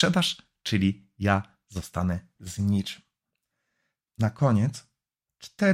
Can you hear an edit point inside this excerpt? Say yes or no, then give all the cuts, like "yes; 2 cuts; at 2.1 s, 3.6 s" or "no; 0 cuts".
yes; 1 cut; at 4.1 s